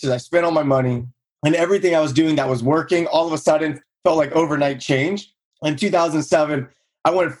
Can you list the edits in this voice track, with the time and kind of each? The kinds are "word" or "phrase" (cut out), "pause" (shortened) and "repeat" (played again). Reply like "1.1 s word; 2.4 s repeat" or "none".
none